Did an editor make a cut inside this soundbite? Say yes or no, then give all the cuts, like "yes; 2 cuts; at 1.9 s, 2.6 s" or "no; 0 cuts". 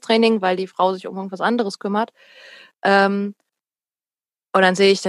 no; 0 cuts